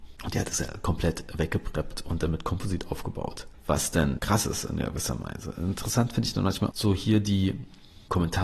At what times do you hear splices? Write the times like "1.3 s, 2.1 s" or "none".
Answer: 4.2 s, 6.7 s